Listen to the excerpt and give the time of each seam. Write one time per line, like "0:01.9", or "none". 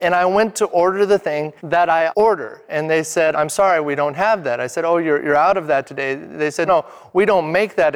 0:01.6
0:02.1
0:03.3
0:06.7